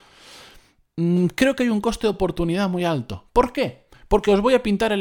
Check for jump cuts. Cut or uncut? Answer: uncut